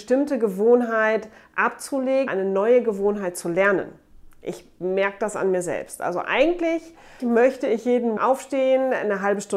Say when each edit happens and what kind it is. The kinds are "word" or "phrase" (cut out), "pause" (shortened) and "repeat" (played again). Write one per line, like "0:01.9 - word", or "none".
0:02.3 - word
0:07.2 - word
0:08.2 - word